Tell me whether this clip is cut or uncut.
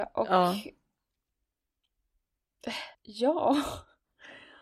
cut